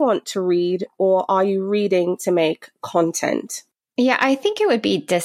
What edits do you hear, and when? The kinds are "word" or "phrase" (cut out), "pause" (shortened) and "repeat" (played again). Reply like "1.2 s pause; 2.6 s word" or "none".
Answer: none